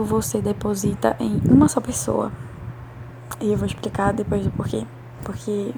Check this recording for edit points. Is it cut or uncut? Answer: uncut